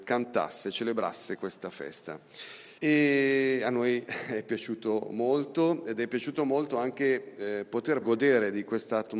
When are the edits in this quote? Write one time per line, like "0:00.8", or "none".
0:02.8
0:08.0